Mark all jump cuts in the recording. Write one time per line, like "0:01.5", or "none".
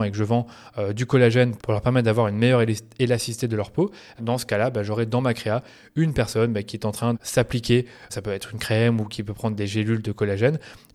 0:01.6
0:04.2
0:07.1
0:08.1